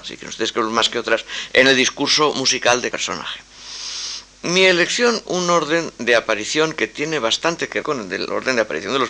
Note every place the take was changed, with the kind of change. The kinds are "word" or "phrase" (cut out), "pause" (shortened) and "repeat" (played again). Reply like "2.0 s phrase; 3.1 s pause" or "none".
2.9 s word; 5.3 s word; 7.8 s word